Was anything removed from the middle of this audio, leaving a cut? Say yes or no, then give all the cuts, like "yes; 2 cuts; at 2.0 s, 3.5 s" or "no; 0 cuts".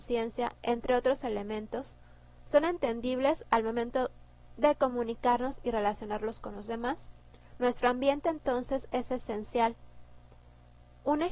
no; 0 cuts